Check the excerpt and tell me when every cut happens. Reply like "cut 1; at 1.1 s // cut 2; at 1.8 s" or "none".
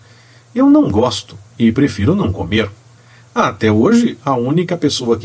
none